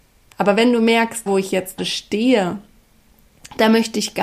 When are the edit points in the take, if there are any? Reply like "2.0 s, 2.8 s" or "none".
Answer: 1.3 s, 1.8 s